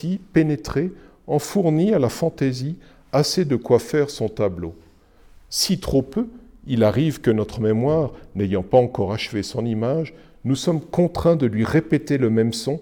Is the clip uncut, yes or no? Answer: yes